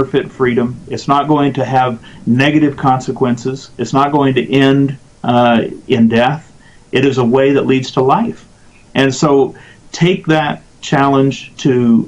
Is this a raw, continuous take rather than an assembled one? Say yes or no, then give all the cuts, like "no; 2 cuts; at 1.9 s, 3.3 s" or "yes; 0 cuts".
yes; 0 cuts